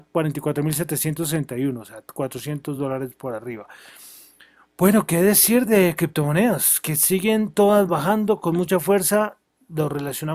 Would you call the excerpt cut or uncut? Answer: uncut